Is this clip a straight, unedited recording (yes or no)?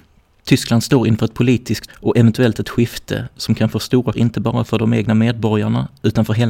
no